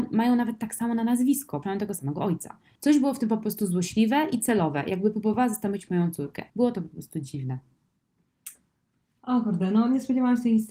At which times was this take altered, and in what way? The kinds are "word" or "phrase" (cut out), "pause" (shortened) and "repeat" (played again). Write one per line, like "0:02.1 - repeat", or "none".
0:01.6 - word
0:06.5 - pause